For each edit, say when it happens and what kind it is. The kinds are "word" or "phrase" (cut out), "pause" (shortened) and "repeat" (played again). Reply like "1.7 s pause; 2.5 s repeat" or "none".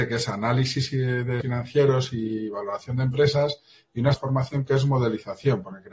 1.4 s word; 4.1 s word